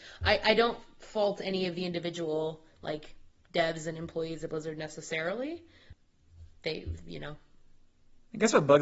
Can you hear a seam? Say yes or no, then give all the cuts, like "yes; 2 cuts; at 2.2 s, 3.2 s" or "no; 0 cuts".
no; 0 cuts